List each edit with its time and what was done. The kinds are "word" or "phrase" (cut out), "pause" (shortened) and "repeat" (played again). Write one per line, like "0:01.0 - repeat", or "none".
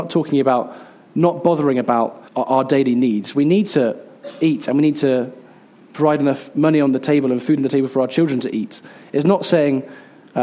0:02.3 - word

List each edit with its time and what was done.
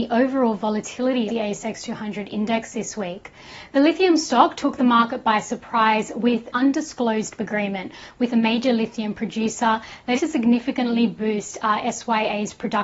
0:01.3 - word
0:06.5 - word
0:07.4 - word
0:10.2 - word

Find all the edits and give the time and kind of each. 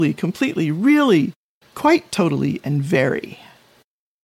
none

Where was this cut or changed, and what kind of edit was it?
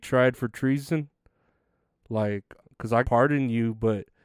0:02.6 - word
0:03.0 - word

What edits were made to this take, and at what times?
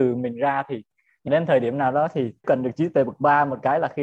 0:01.3 - word
0:02.4 - word

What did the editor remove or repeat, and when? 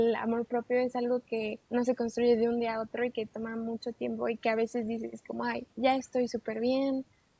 0:01.6 - pause
0:05.7 - pause

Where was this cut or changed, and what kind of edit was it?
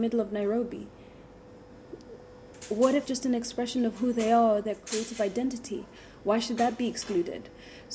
0:03.0 - word

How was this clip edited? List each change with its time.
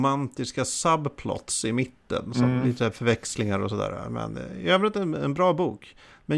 none

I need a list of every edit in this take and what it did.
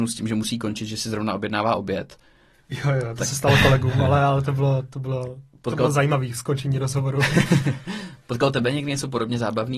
none

